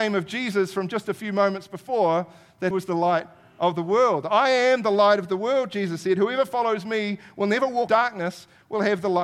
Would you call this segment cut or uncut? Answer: cut